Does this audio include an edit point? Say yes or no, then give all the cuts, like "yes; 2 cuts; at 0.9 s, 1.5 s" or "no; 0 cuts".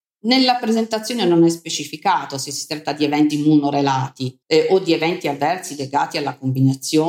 yes; 2 cuts; at 3.3 s, 4.4 s